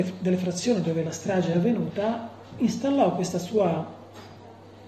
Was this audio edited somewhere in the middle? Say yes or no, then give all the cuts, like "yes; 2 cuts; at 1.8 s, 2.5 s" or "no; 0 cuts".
no; 0 cuts